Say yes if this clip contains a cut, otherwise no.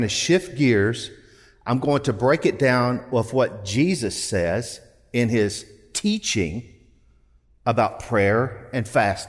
no